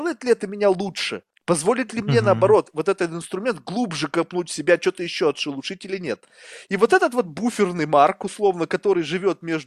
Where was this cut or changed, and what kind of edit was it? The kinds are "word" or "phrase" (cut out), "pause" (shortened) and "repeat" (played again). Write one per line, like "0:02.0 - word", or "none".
0:01.3 - pause